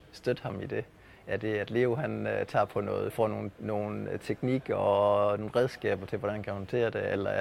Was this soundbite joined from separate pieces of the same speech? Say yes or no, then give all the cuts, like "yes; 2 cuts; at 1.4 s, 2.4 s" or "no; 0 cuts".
yes; 1 cut; at 3.1 s